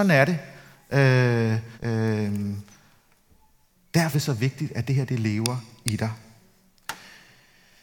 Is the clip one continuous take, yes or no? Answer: no